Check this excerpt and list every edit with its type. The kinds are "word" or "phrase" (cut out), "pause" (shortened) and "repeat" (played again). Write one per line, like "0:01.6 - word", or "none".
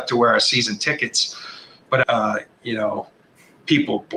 0:02.0 - word